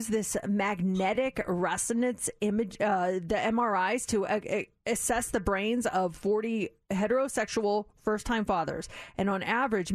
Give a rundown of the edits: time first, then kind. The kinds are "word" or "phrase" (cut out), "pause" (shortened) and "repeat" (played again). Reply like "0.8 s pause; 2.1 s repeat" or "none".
none